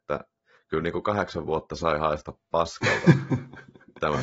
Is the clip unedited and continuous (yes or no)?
yes